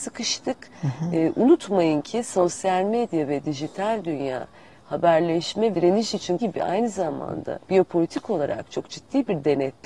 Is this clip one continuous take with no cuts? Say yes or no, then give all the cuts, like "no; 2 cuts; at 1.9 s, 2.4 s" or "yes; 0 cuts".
no; 3 cuts; at 5.7 s, 6.4 s, 7.6 s